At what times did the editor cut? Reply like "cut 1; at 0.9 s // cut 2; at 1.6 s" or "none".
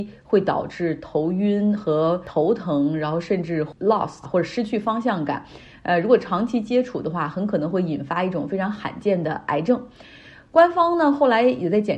cut 1; at 4.2 s